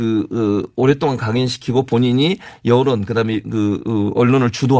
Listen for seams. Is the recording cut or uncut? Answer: uncut